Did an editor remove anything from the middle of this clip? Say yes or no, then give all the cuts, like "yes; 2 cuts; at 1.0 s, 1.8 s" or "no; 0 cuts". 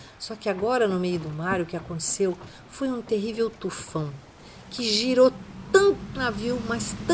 yes; 1 cut; at 6.2 s